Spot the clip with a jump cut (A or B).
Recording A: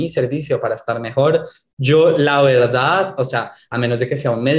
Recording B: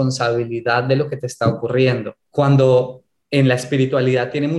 B